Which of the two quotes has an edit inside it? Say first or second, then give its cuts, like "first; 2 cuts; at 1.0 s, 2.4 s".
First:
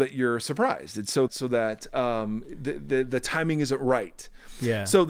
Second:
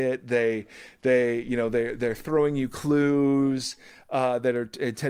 first; 1 cut; at 1.3 s